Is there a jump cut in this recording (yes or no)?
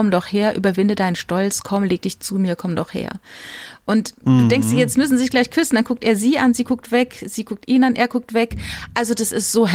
no